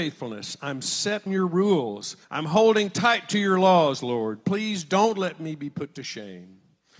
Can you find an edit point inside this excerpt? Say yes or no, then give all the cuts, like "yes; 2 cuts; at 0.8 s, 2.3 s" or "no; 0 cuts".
yes; 2 cuts; at 1.3 s, 2.2 s